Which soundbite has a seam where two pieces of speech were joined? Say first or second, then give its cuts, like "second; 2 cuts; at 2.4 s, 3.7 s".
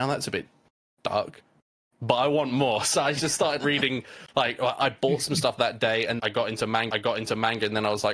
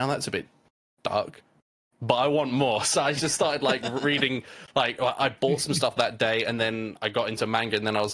first; 3 cuts; at 3.6 s, 6.2 s, 6.9 s